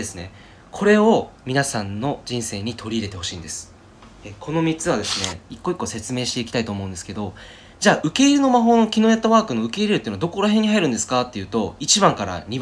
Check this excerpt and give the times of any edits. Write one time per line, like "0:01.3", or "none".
0:07.7